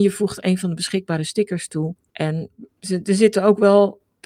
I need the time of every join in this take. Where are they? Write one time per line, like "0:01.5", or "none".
0:02.7

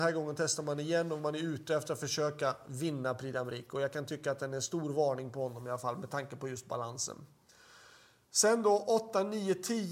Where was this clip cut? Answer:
none

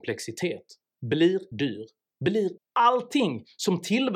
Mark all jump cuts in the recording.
0:01.5
0:02.6

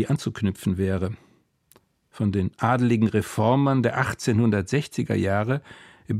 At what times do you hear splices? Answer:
none

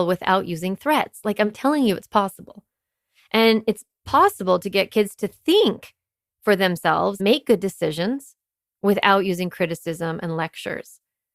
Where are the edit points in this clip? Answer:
0:07.2

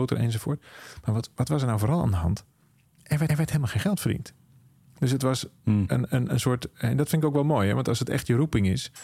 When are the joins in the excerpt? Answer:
0:03.3

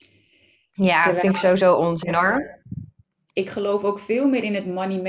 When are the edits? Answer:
none

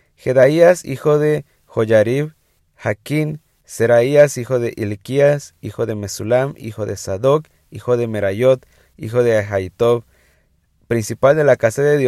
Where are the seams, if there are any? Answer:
none

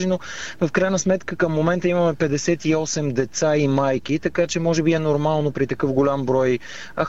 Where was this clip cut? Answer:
none

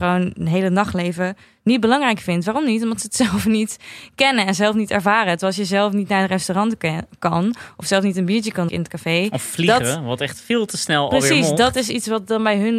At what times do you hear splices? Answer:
0:08.7

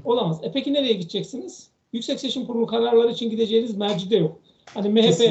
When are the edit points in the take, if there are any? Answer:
0:01.8

